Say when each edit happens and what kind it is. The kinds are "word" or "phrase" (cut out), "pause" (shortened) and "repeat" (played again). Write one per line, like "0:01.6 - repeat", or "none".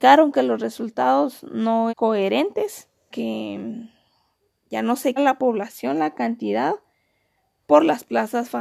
0:01.9 - word
0:03.1 - word
0:05.2 - phrase